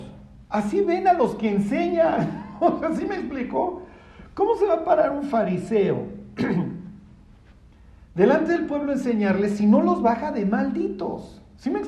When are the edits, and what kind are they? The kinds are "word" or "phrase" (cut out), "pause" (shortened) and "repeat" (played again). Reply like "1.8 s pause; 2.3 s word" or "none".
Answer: none